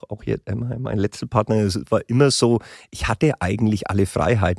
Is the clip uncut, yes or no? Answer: yes